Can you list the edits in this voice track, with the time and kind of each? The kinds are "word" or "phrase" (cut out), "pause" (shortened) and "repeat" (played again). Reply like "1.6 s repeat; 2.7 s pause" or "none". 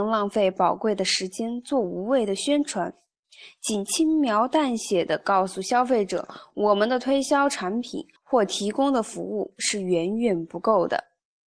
8.2 s pause